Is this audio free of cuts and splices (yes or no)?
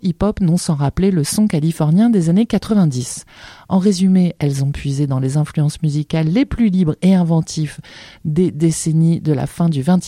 yes